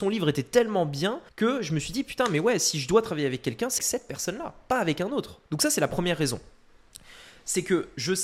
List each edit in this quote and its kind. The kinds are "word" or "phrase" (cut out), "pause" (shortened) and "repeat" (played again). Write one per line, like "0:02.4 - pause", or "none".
0:01.3 - pause
0:03.8 - word
0:05.5 - pause